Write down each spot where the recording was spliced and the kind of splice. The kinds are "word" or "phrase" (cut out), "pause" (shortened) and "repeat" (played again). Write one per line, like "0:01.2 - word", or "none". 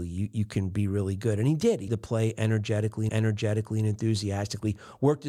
0:01.9 - word
0:03.1 - repeat